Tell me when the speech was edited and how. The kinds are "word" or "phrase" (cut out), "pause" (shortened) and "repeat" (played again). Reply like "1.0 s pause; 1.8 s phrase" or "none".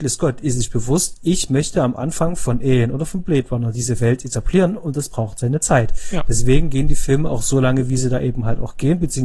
none